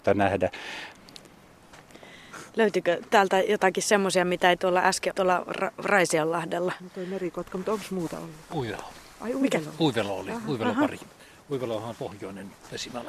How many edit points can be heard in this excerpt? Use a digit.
2